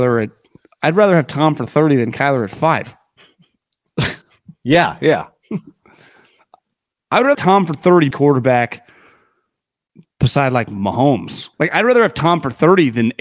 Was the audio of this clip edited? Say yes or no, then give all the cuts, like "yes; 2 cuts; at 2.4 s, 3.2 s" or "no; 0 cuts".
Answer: yes; 4 cuts; at 4.2 s, 7.3 s, 8.1 s, 11.5 s